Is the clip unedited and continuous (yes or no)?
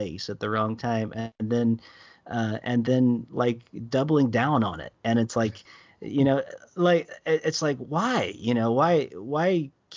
yes